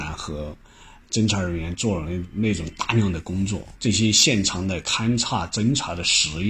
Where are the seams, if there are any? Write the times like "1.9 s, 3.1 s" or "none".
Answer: 3.7 s